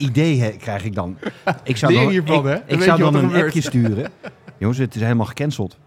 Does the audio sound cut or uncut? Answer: uncut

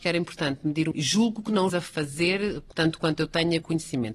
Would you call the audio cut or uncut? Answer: cut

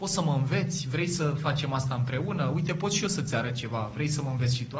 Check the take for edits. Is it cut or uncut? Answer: uncut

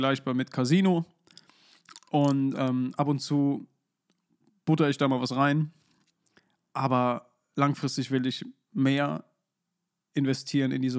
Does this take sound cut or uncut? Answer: uncut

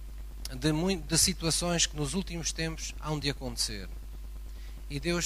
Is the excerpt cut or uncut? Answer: uncut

